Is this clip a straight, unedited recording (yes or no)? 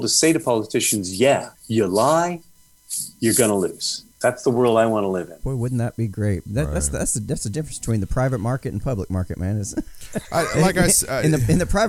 no